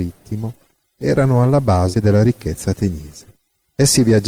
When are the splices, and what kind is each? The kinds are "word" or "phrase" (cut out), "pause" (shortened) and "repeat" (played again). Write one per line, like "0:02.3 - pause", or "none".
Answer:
0:01.9 - word